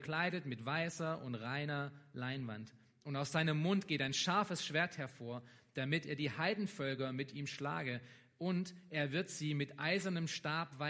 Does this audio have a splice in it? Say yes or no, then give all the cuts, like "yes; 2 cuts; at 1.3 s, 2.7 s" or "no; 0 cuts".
no; 0 cuts